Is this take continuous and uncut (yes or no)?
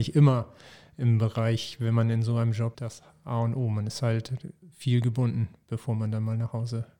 no